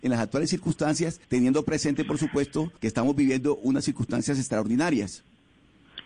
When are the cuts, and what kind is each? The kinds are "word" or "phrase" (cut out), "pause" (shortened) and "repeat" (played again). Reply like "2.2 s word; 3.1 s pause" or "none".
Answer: 1.2 s pause; 2.8 s pause